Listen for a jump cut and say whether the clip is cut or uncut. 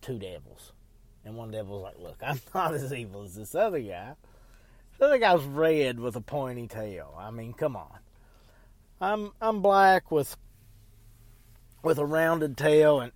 uncut